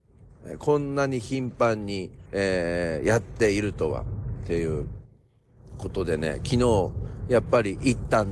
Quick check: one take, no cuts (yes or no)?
no